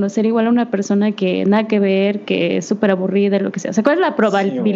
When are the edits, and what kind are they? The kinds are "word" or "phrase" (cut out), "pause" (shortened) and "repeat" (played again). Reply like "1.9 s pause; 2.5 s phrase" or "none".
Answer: none

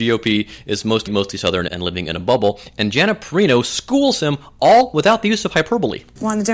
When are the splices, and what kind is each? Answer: 1.1 s word; 1.7 s word

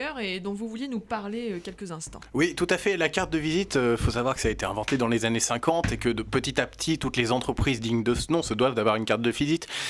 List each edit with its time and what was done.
none

